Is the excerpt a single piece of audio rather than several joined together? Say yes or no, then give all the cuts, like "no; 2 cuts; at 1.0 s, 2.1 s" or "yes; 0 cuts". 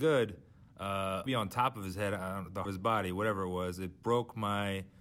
no; 2 cuts; at 1.3 s, 2.6 s